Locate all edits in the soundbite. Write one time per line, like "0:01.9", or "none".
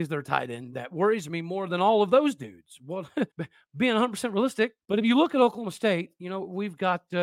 0:03.3
0:04.8